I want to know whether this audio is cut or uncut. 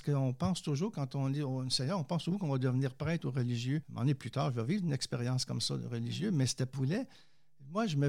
cut